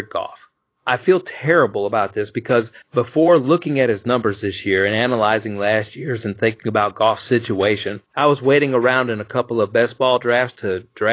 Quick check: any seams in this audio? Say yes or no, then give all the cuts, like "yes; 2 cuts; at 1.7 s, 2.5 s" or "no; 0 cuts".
yes; 2 cuts; at 2.8 s, 8.1 s